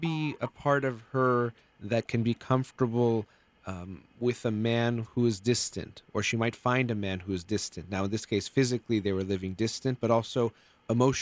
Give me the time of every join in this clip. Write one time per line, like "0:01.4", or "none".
none